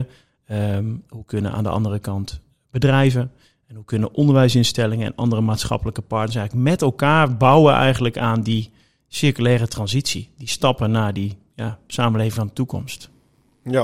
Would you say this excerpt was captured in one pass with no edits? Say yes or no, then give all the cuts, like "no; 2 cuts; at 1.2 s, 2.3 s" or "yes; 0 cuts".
yes; 0 cuts